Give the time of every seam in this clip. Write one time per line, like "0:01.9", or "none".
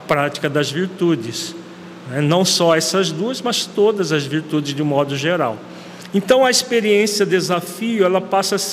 none